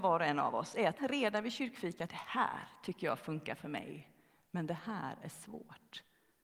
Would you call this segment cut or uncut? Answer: cut